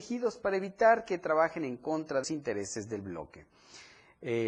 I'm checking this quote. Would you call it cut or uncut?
cut